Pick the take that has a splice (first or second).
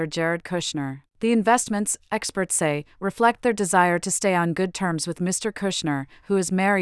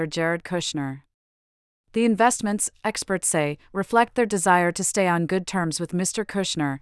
first